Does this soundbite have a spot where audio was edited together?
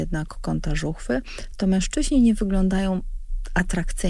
no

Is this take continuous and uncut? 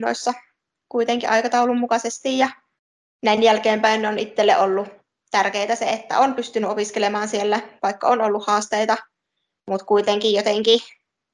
yes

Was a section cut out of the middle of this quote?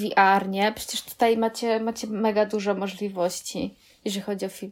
no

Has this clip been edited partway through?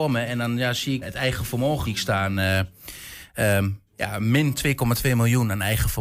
yes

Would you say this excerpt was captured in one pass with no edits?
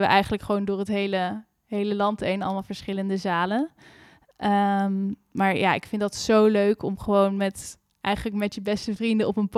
yes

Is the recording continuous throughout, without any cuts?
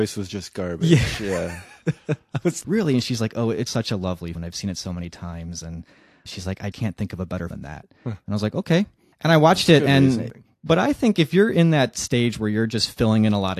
no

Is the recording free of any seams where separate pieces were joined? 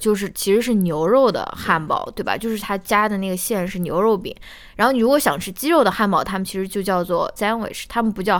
no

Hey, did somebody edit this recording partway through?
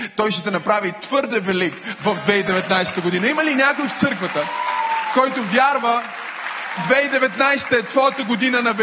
yes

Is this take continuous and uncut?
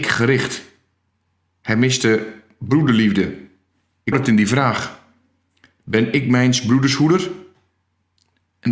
no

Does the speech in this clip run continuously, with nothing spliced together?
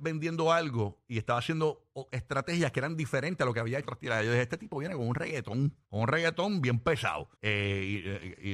no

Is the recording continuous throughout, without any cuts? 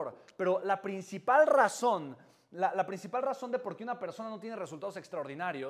yes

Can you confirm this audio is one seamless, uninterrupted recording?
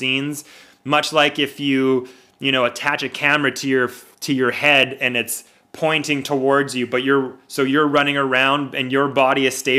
yes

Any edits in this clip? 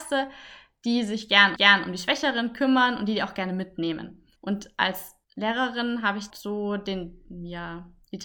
yes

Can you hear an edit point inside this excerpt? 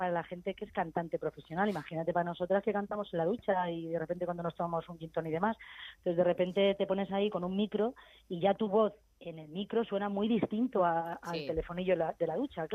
no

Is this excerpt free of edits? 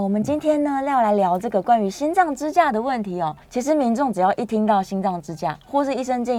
no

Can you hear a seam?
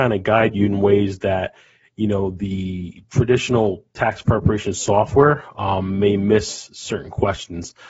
no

